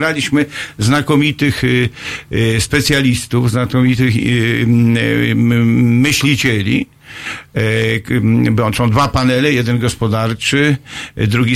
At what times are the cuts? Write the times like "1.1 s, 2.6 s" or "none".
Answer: none